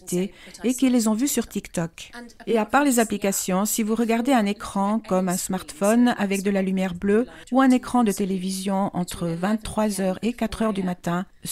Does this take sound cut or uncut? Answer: uncut